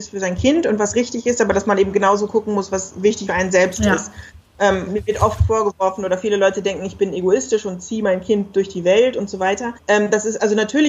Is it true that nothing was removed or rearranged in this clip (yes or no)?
no